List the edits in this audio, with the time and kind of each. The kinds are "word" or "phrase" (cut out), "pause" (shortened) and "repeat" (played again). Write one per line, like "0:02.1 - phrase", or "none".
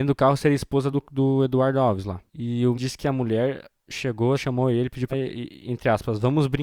0:00.9 - word
0:02.3 - pause
0:02.7 - word
0:04.4 - word
0:05.1 - phrase